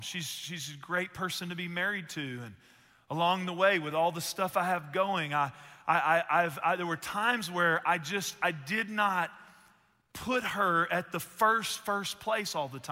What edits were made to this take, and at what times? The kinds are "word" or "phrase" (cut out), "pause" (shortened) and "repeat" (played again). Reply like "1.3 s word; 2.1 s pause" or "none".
none

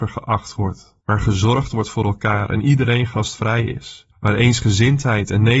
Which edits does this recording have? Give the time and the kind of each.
1.0 s pause; 4.1 s pause

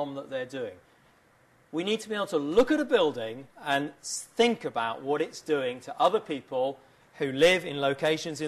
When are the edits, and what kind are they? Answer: 3.5 s pause

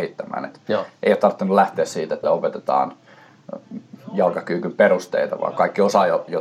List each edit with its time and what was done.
2.2 s word

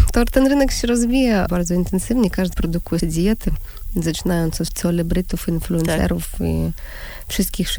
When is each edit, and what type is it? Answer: 1.5 s word; 2.5 s word; 3.0 s word; 4.7 s word

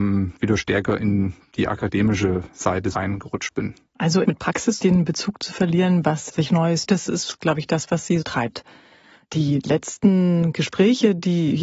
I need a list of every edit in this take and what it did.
2.9 s word; 4.2 s word; 4.8 s phrase; 6.3 s word; 6.9 s word; 8.2 s word

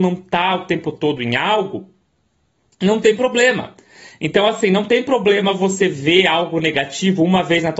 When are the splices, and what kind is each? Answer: none

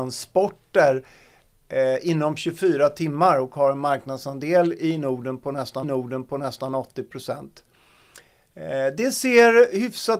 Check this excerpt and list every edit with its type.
5.8 s repeat

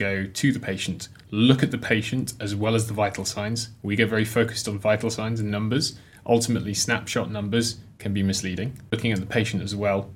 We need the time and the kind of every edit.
none

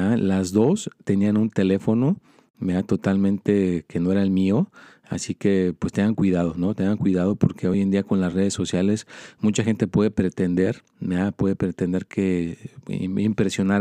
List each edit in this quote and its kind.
none

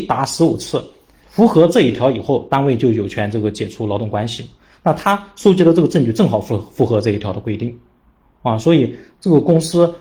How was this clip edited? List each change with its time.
none

